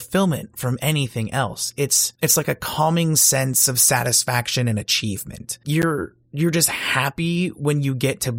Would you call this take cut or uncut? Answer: uncut